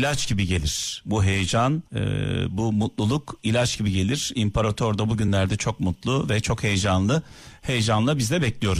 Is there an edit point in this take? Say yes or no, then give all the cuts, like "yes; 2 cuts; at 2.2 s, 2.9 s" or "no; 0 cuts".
yes; 1 cut; at 1.9 s